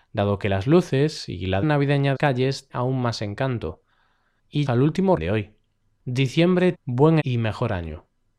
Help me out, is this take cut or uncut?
cut